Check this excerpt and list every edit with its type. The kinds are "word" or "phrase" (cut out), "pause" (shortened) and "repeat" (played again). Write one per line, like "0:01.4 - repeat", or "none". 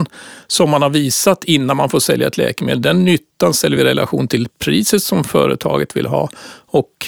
none